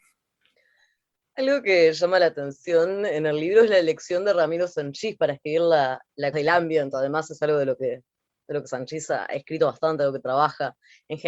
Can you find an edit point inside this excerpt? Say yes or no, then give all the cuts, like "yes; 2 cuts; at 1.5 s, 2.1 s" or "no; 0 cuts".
yes; 1 cut; at 6.3 s